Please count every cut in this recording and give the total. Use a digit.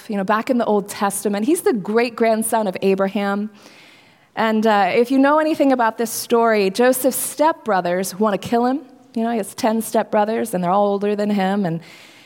0